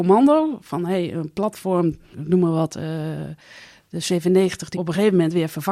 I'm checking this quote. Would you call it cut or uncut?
cut